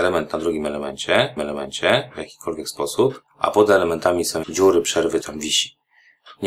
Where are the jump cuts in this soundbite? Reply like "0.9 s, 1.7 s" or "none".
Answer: 1.4 s, 3.3 s, 4.4 s, 5.2 s